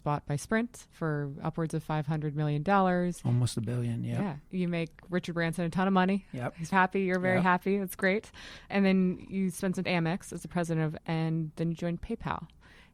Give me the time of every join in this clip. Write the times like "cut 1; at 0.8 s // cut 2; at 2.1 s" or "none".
cut 1; at 6.7 s // cut 2; at 9.9 s // cut 3; at 11.0 s